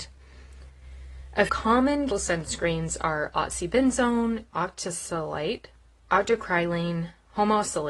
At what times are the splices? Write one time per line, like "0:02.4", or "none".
0:01.5
0:02.1
0:04.5
0:05.8